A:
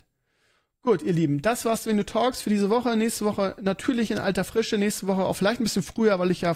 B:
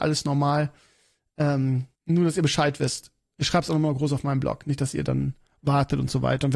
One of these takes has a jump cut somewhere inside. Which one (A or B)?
B